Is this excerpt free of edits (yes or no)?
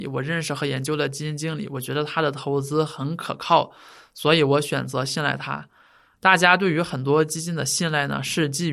yes